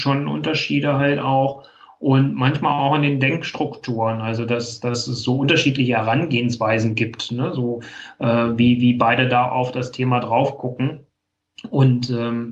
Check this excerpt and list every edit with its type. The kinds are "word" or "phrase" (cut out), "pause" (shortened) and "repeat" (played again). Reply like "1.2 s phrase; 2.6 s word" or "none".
none